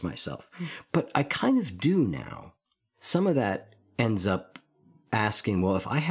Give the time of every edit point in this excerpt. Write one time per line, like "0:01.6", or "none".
none